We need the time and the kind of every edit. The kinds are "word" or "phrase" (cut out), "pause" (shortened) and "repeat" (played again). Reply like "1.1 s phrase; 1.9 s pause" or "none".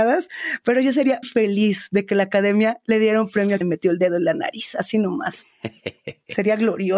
1.2 s word; 3.6 s word